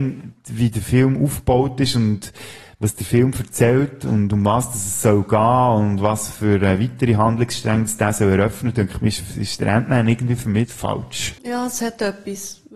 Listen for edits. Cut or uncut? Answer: cut